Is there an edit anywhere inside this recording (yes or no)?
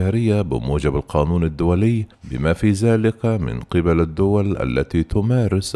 yes